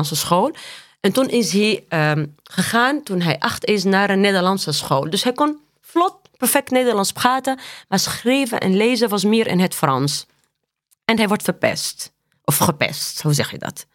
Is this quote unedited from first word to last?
yes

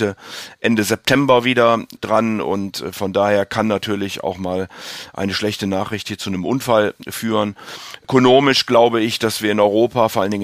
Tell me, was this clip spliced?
no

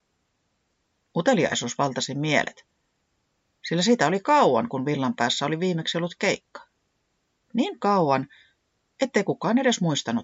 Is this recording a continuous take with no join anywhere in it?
yes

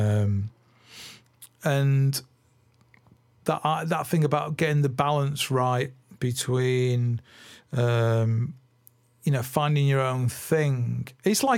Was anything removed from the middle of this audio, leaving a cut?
no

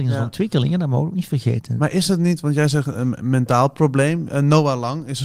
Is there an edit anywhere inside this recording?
no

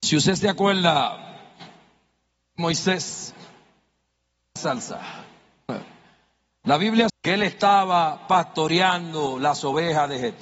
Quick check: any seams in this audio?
yes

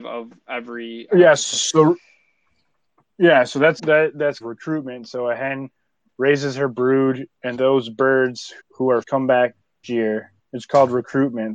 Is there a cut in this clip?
yes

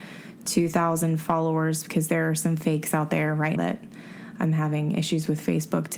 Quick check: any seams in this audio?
yes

